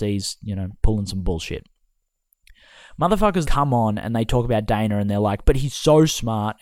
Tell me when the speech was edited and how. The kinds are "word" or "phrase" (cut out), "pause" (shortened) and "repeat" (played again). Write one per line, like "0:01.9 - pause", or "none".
0:03.5 - word